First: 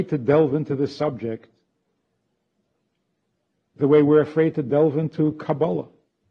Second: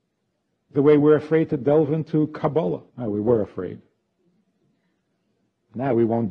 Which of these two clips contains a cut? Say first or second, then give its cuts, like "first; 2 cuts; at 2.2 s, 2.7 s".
second; 1 cut; at 2.9 s